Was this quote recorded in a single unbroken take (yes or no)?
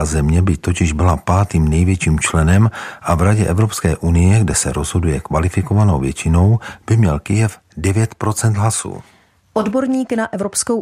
yes